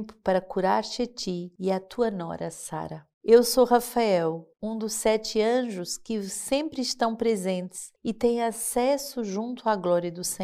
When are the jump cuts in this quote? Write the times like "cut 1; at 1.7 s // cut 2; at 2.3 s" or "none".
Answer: cut 1; at 3.1 s // cut 2; at 4.5 s